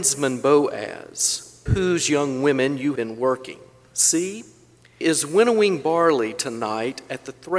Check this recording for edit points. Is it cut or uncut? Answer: cut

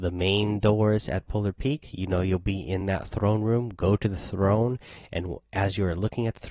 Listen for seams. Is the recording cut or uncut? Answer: uncut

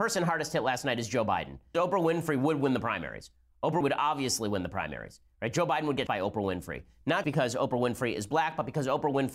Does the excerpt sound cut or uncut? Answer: cut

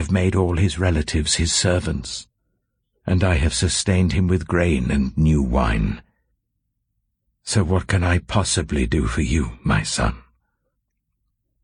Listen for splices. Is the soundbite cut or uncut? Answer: uncut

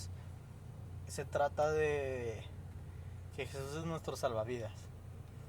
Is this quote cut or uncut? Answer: uncut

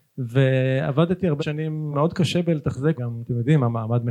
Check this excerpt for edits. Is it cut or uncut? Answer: cut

